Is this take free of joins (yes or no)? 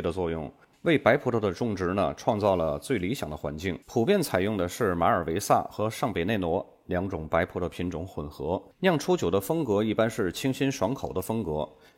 no